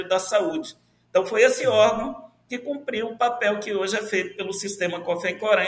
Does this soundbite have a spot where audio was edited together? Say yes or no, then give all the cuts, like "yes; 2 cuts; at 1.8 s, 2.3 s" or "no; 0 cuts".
no; 0 cuts